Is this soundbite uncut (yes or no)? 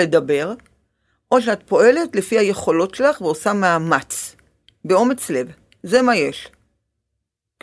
yes